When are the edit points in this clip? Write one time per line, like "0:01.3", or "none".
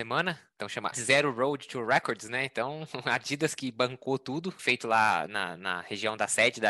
0:00.9
0:04.6